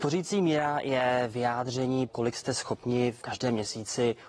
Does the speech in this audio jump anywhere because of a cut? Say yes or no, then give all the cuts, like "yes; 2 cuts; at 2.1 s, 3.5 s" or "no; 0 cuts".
yes; 2 cuts; at 2.1 s, 3.2 s